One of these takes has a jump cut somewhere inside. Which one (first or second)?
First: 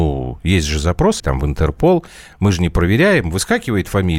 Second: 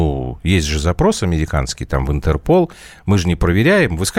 first